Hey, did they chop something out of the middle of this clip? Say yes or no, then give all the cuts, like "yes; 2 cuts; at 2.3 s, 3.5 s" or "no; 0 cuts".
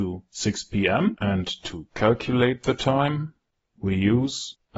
no; 0 cuts